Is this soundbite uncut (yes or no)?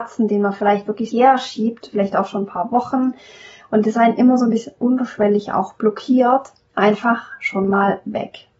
no